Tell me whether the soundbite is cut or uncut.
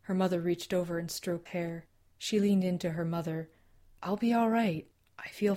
cut